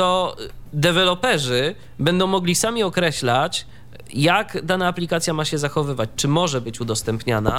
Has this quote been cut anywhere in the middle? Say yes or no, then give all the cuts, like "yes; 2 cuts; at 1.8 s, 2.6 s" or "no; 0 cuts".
no; 0 cuts